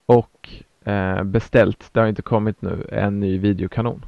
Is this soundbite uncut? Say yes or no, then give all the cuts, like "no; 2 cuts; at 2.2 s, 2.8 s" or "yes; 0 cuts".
yes; 0 cuts